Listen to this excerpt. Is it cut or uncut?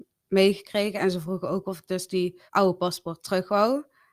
cut